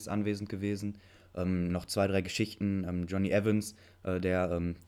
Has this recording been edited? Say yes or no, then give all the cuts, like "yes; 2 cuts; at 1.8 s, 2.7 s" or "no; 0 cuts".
no; 0 cuts